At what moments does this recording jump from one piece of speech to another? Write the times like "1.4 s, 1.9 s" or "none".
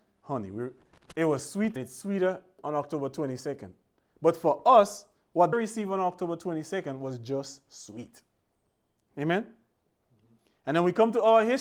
1.8 s, 5.5 s